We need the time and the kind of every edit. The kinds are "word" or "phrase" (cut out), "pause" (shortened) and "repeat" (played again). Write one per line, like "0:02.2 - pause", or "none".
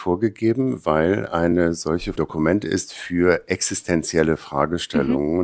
0:02.2 - phrase